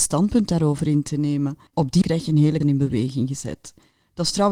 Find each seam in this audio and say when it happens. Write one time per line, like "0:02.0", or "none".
0:01.7
0:02.0
0:02.6